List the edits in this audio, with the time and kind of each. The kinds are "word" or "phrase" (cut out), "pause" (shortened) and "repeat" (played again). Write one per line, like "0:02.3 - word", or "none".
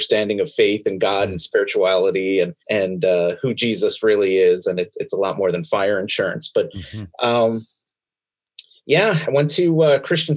0:02.6 - pause